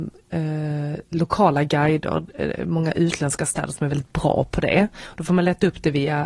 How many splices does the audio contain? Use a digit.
0